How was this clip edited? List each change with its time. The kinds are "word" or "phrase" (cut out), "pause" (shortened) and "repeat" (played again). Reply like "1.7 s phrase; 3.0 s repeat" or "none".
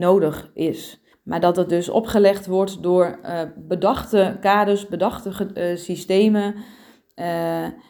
1.1 s pause